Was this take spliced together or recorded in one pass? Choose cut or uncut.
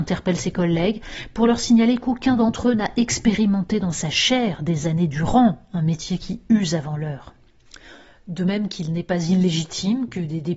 uncut